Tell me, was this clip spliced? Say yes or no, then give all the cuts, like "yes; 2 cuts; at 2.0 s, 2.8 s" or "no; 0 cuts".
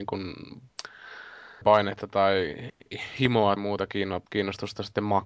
yes; 2 cuts; at 1.6 s, 3.6 s